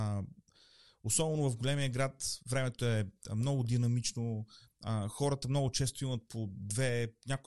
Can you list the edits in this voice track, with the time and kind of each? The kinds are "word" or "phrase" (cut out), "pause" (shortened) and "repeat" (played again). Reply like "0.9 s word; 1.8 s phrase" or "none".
none